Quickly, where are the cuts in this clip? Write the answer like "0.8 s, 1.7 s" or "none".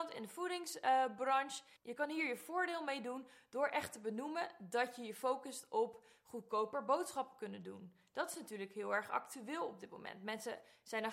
1.8 s